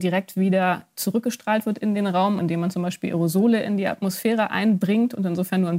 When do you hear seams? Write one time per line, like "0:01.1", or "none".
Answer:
0:02.4

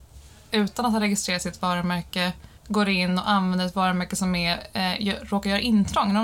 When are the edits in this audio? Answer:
0:02.6

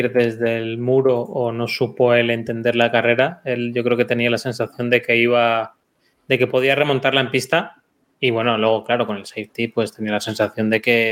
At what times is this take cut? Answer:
none

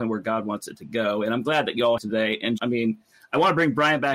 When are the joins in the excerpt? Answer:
0:02.0
0:02.6

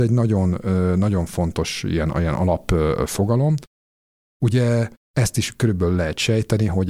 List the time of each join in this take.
none

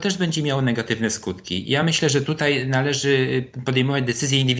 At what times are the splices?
none

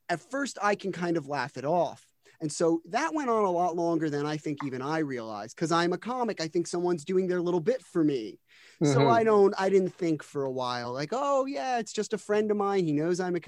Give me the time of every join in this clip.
none

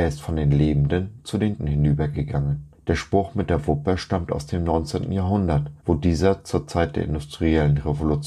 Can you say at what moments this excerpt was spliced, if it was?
0:01.6
0:02.7
0:05.8

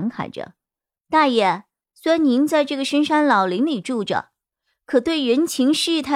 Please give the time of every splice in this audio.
none

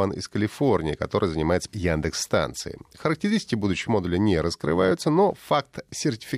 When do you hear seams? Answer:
0:01.7
0:03.9

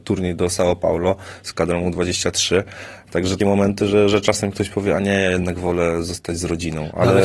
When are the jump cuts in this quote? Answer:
0:03.4

